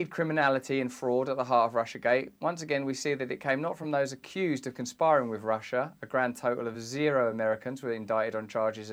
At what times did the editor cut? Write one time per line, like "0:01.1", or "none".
none